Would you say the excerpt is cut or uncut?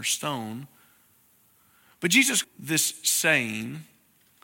cut